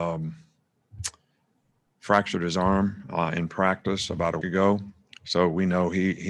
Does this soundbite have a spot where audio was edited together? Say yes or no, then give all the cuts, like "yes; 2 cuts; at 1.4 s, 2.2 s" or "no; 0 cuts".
yes; 1 cut; at 4.4 s